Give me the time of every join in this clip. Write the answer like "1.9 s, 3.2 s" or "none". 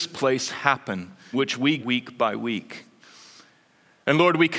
1.3 s, 1.8 s